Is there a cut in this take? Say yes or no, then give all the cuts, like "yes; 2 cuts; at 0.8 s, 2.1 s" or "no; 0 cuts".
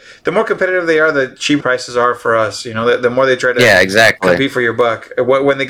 yes; 1 cut; at 1.6 s